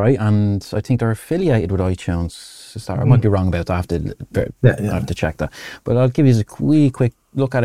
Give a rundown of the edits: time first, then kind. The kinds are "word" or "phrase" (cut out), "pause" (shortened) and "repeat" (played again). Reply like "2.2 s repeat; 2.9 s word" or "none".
4.6 s pause